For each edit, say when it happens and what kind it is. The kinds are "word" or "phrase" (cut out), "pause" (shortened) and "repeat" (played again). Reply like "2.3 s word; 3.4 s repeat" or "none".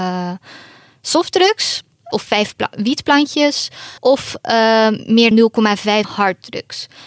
2.1 s word; 4.0 s pause; 5.3 s word; 6.0 s word